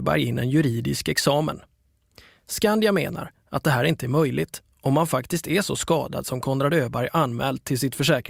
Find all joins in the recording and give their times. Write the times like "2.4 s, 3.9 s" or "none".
none